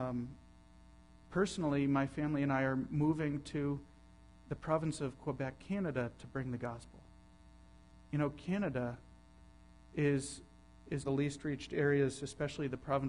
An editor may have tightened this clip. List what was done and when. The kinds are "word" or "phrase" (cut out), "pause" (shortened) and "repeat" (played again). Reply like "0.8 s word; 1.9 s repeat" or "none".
11.0 s phrase